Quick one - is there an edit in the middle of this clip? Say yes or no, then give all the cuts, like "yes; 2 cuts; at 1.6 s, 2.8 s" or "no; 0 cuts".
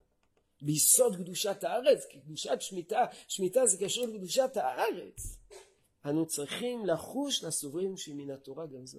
no; 0 cuts